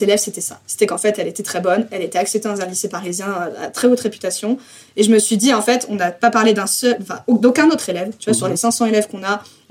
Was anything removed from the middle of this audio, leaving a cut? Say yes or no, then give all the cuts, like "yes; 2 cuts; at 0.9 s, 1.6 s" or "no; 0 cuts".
no; 0 cuts